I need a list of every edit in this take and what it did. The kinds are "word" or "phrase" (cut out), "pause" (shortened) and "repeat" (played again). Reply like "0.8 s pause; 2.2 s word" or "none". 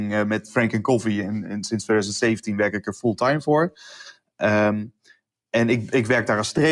none